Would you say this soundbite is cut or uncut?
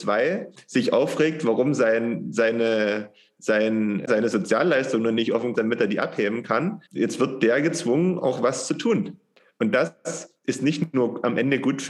cut